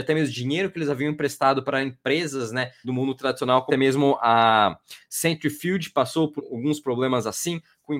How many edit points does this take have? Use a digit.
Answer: 3